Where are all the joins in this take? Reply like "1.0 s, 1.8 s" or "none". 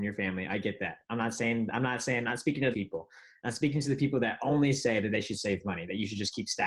2.7 s